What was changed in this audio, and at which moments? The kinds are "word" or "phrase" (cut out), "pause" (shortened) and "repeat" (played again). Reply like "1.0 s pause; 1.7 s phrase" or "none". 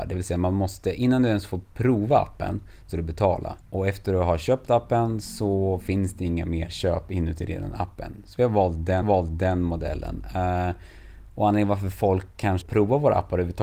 2.9 s word; 3.6 s pause; 9.0 s repeat; 12.6 s word